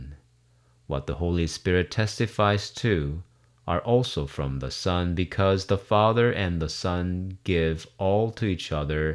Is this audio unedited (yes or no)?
yes